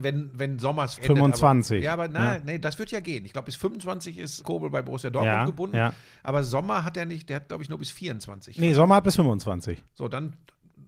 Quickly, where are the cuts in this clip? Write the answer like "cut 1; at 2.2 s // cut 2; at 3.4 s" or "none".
cut 1; at 1.0 s // cut 2; at 2.6 s // cut 3; at 4.4 s